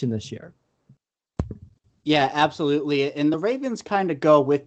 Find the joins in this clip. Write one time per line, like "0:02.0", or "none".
none